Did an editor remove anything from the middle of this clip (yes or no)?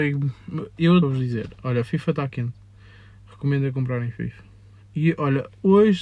yes